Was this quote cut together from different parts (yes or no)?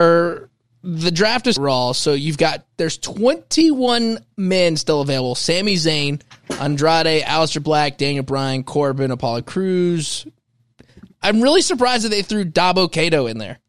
yes